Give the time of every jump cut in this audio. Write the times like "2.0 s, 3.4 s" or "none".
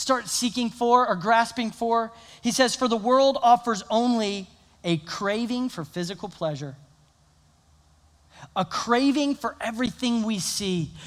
none